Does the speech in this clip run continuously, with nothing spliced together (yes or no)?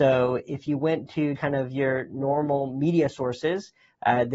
no